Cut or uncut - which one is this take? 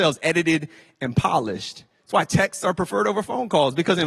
uncut